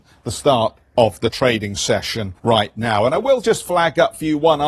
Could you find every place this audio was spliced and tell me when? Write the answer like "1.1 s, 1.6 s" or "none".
2.4 s